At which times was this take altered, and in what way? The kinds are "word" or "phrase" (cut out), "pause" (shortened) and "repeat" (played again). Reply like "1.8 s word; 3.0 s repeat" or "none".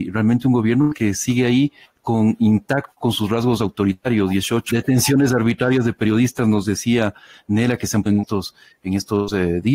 4.7 s word; 8.1 s word